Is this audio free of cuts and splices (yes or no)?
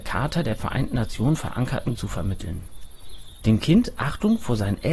no